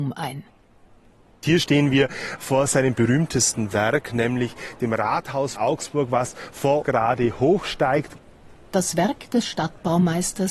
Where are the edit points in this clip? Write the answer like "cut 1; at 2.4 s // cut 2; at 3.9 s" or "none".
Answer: cut 1; at 5.6 s // cut 2; at 6.8 s

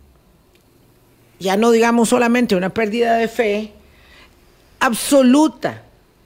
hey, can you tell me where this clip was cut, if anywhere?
none

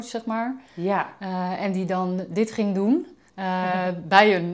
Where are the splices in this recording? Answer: cut 1; at 3.3 s

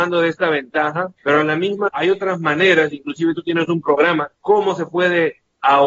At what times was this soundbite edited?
cut 1; at 1.2 s // cut 2; at 1.9 s // cut 3; at 4.4 s

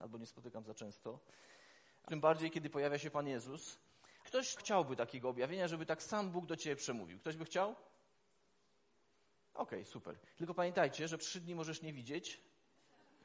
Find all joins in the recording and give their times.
cut 1; at 2.1 s // cut 2; at 4.2 s // cut 3; at 4.6 s // cut 4; at 11.2 s

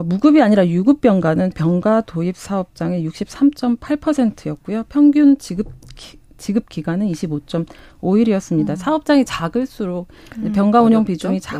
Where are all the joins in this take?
cut 1; at 1.5 s

